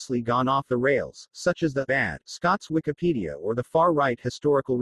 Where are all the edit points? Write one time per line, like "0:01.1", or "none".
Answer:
0:01.9